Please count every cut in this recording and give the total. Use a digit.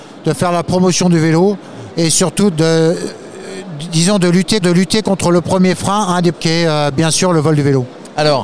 3